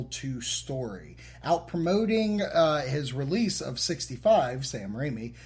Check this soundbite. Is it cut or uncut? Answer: uncut